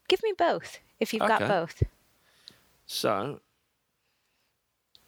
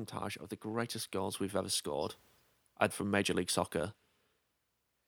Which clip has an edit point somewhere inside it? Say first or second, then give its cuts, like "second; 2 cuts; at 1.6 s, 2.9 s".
second; 1 cut; at 2.9 s